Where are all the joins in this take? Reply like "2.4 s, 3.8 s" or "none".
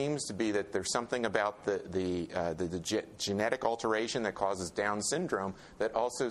none